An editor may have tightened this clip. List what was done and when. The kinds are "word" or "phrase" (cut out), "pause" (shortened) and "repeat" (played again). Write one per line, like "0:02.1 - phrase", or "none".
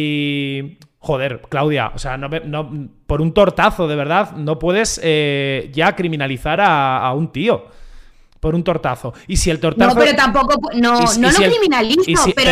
none